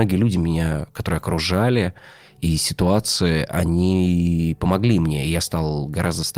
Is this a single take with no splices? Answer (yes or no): yes